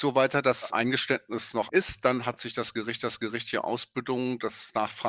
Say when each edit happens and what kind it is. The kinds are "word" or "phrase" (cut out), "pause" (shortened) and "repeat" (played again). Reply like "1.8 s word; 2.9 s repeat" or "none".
1.7 s word; 3.0 s repeat